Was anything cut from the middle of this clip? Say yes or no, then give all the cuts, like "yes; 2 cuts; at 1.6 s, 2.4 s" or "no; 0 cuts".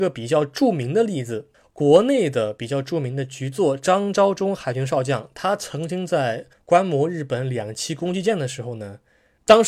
yes; 2 cuts; at 1.5 s, 6.5 s